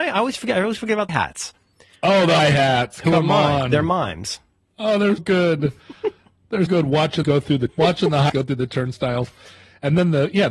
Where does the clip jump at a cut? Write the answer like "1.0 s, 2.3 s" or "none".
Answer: 1.1 s, 2.4 s, 5.2 s, 6.7 s, 7.2 s, 7.7 s, 8.3 s